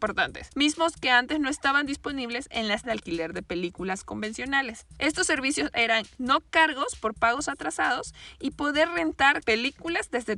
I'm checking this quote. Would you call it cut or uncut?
cut